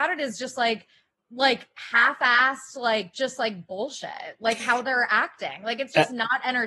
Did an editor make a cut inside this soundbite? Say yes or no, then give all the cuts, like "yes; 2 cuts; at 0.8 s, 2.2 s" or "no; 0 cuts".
no; 0 cuts